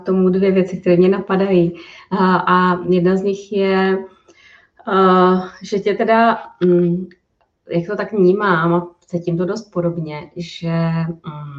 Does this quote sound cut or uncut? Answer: uncut